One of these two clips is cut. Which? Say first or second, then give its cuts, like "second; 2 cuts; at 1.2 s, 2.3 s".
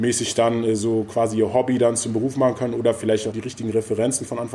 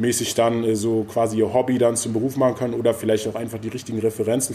first; 1 cut; at 3.3 s